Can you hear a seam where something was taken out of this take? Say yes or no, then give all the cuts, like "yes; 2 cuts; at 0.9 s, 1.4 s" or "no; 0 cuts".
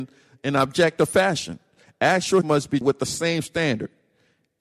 yes; 2 cuts; at 2.4 s, 2.8 s